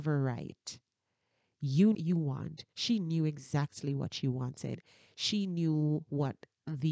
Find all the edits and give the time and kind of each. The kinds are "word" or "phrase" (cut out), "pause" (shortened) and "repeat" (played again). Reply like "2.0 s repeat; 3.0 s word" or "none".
1.9 s phrase